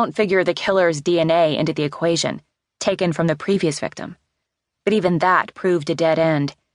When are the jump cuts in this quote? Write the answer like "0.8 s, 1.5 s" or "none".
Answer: none